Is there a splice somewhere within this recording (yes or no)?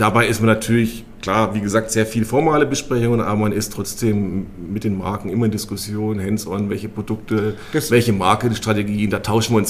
no